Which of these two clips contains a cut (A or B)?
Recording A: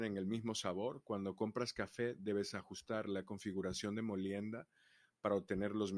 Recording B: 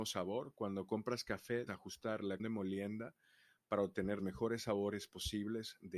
B